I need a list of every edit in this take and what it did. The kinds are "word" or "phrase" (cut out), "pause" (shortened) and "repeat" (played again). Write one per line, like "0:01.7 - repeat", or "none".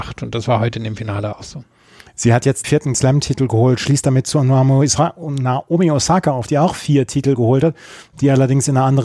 0:02.6 - word
0:02.9 - word

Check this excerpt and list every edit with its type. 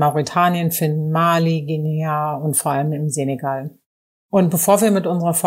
none

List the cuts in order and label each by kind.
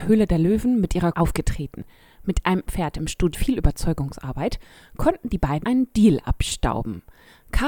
0:01.1 - phrase
0:02.7 - word
0:03.3 - word
0:05.6 - word

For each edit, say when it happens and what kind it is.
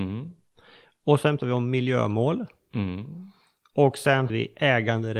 0:01.4 - word
0:04.3 - word

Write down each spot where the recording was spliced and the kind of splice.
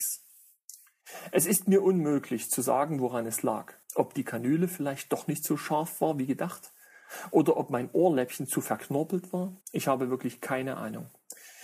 0:03.8 - pause
0:09.6 - pause

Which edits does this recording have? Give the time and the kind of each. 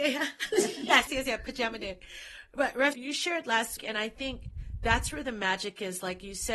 0:01.1 - word
0:02.9 - word
0:03.8 - word

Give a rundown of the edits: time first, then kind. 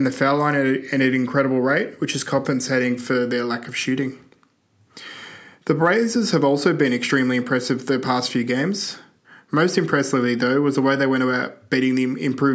none

